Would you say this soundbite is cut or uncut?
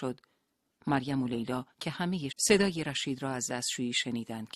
cut